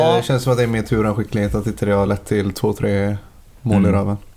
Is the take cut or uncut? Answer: uncut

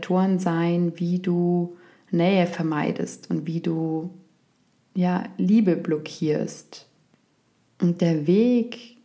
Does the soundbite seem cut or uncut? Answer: uncut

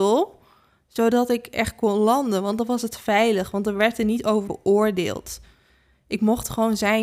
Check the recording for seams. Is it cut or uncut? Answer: cut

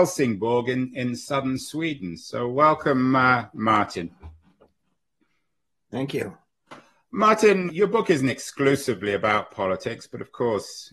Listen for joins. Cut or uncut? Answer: cut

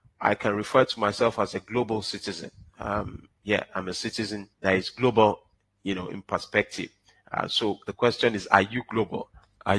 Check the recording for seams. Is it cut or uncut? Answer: cut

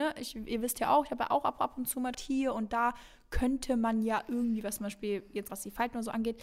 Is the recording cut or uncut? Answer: cut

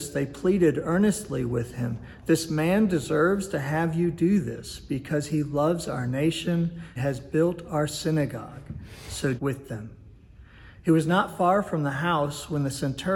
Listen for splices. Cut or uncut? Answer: cut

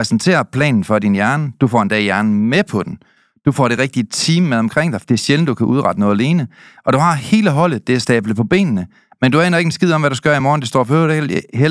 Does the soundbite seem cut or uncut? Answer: uncut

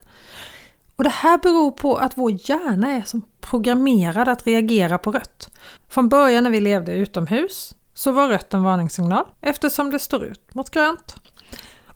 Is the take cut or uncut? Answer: cut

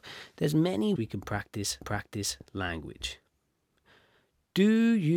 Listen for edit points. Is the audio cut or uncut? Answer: cut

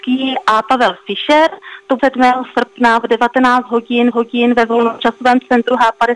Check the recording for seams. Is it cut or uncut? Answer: cut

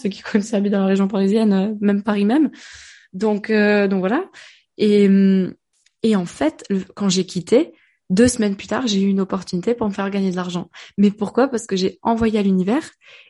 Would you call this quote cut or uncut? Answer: uncut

